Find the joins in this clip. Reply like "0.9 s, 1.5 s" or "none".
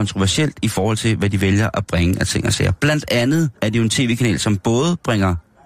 3.6 s